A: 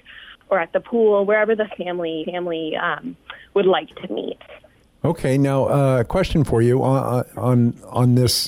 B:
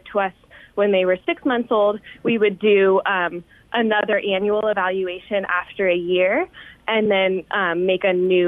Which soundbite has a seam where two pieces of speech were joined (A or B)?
A